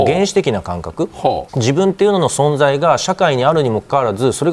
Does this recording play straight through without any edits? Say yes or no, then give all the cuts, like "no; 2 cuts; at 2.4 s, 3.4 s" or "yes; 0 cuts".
no; 1 cut; at 1.5 s